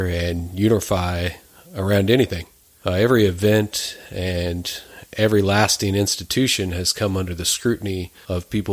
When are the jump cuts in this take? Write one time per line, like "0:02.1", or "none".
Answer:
none